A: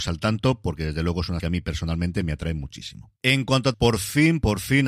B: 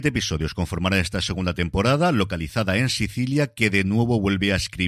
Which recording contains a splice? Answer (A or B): A